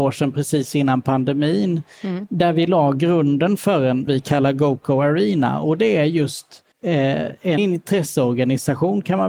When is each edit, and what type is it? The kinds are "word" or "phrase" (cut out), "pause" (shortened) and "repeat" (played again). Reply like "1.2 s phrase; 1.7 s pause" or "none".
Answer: 4.1 s phrase; 6.7 s pause; 7.6 s word